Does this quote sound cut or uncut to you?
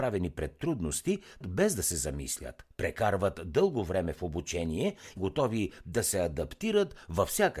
cut